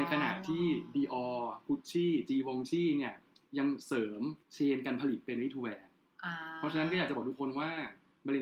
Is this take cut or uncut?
cut